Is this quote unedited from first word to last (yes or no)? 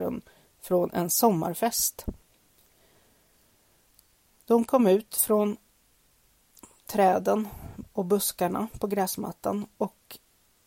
yes